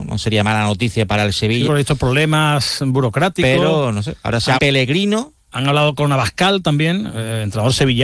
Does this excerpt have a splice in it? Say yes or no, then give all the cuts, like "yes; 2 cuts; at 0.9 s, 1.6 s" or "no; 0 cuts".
yes; 3 cuts; at 1.1 s, 1.7 s, 4.6 s